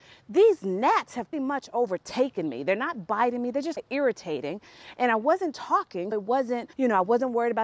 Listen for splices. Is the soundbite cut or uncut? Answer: cut